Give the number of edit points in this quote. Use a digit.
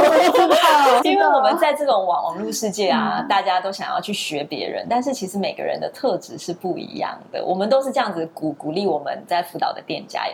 1